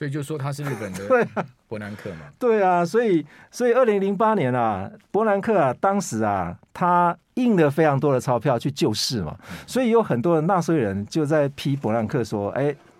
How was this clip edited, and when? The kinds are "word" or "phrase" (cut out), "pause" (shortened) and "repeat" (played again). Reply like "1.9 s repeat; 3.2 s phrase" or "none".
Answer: none